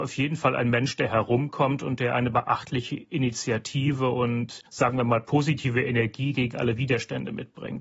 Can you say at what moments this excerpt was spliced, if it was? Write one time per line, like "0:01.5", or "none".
0:04.7